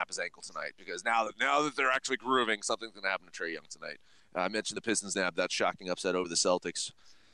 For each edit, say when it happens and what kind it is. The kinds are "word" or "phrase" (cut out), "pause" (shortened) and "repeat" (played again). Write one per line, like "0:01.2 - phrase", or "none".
0:04.2 - pause